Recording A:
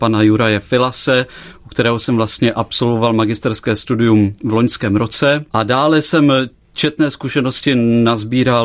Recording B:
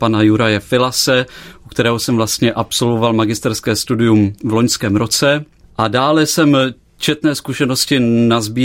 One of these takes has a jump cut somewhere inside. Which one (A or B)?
A